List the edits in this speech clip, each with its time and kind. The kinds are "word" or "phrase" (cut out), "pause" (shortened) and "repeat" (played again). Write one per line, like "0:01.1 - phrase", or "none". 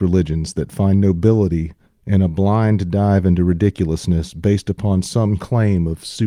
0:01.9 - pause
0:05.4 - word